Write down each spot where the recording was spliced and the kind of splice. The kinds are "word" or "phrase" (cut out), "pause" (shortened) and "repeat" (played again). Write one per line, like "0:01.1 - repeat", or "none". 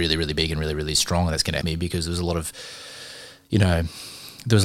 0:01.6 - word